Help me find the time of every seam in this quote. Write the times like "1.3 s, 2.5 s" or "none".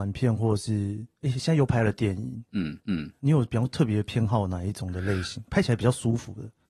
2.8 s